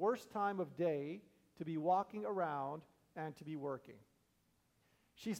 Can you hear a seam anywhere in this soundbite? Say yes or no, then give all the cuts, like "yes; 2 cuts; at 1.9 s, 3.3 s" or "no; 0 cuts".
no; 0 cuts